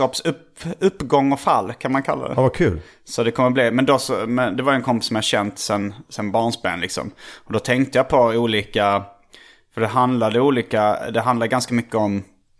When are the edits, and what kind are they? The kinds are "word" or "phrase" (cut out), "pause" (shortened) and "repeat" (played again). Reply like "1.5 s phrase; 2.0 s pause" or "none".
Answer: none